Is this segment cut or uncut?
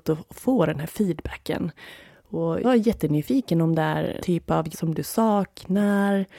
cut